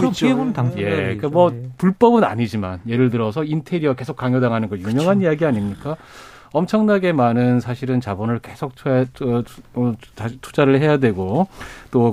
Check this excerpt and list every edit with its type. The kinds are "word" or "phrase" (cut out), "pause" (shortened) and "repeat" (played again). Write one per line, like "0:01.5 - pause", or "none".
none